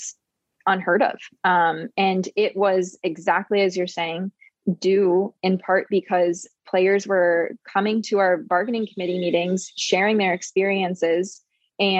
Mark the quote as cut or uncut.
uncut